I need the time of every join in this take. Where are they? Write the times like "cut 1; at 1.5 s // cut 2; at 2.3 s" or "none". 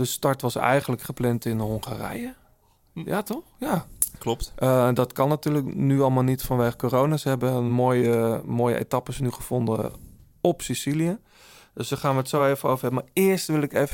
none